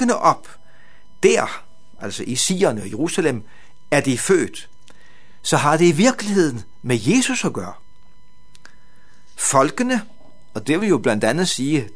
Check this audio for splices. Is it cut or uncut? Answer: uncut